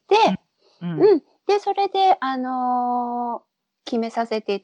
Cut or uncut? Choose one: uncut